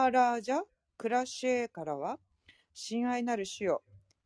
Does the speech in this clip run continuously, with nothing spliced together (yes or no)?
yes